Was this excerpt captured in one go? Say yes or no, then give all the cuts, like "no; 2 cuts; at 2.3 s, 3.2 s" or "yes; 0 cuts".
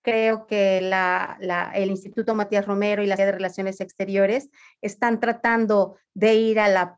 no; 1 cut; at 3.2 s